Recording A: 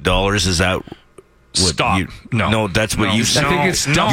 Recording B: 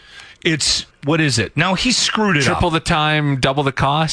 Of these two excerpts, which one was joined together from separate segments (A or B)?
B